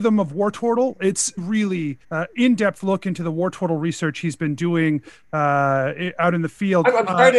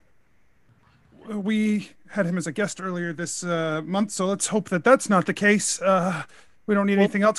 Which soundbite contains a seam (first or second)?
first